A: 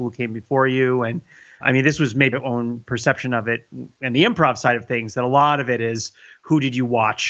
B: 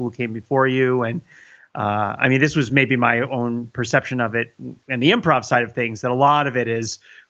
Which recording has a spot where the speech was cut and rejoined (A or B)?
A